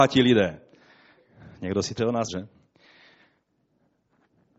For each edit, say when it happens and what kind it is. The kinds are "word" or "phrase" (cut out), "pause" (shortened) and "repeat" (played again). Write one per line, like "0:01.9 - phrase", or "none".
0:02.0 - word
0:02.3 - word